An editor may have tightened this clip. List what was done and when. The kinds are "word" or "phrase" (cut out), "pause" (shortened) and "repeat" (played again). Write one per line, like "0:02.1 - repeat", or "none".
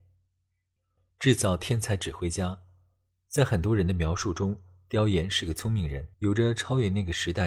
0:06.1 - pause